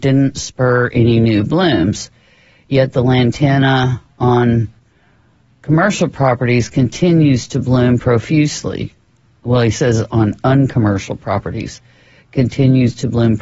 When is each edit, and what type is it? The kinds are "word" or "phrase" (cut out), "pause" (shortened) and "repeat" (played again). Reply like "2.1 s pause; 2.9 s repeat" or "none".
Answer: none